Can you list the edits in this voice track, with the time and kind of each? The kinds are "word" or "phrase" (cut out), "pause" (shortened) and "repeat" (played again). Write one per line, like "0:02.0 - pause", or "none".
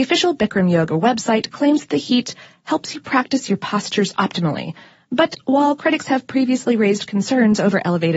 none